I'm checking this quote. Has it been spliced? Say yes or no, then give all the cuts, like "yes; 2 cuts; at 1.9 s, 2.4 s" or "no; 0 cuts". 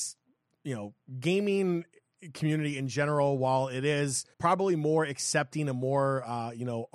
yes; 1 cut; at 4.3 s